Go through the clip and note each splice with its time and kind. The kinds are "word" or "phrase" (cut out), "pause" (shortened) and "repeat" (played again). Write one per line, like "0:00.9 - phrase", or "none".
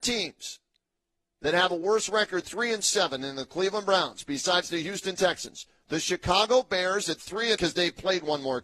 0:02.4 - word
0:07.6 - word